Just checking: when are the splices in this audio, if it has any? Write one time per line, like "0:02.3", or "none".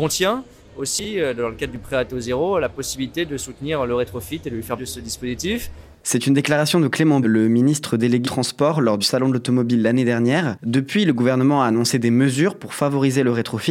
0:04.8
0:07.2
0:08.2
0:09.0